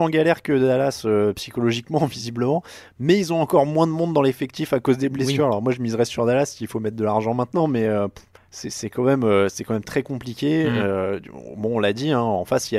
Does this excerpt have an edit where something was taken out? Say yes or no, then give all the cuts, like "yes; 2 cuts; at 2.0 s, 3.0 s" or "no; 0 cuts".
yes; 1 cut; at 8.4 s